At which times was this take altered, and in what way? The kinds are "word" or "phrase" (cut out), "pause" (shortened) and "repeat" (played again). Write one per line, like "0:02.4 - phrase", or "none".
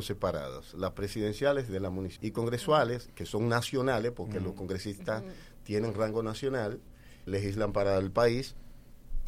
0:02.2 - word
0:07.3 - word